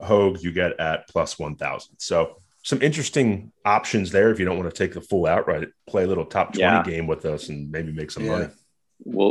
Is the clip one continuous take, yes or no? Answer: no